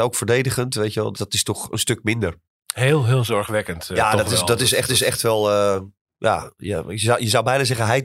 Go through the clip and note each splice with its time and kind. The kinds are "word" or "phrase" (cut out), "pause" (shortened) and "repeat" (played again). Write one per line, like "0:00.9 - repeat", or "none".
0:01.1 - word
0:04.9 - repeat